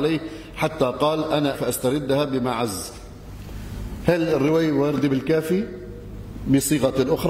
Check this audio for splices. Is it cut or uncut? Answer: cut